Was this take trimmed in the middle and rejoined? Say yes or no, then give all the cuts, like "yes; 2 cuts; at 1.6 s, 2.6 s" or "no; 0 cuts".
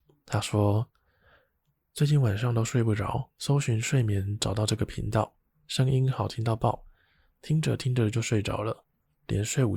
yes; 1 cut; at 3.3 s